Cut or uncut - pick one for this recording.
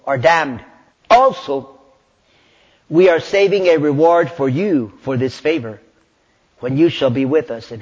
cut